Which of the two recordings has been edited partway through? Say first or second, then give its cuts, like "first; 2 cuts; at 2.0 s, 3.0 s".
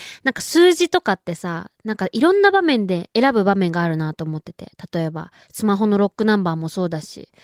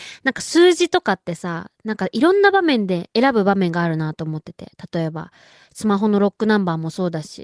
first; 1 cut; at 5.4 s